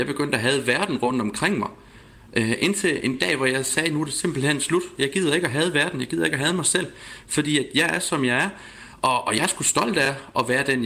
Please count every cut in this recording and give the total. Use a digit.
0